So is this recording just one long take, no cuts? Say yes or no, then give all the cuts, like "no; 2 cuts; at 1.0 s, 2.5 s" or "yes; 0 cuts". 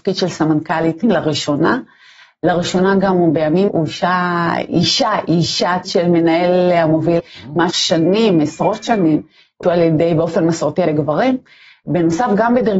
no; 7 cuts; at 1.0 s, 3.7 s, 5.8 s, 7.2 s, 7.7 s, 9.6 s, 10.9 s